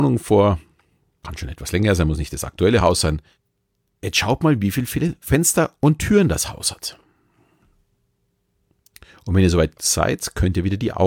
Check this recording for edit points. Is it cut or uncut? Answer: uncut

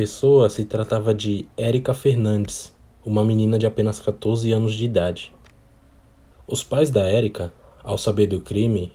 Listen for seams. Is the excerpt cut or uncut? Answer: uncut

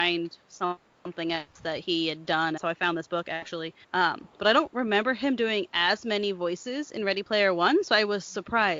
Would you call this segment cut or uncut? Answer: cut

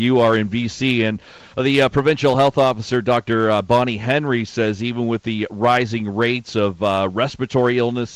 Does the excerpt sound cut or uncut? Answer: uncut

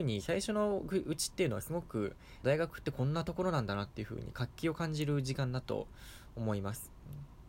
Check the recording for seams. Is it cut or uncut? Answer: cut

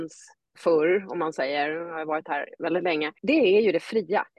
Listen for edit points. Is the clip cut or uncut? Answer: cut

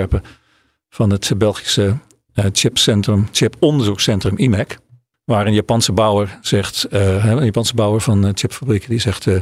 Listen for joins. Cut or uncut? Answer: uncut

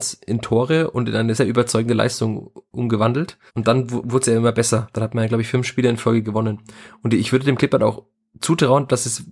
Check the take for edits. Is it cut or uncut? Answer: cut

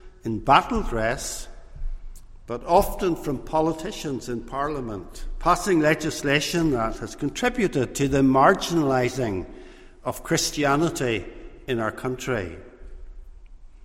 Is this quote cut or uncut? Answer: uncut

